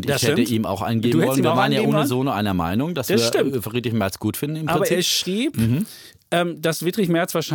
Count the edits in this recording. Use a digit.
0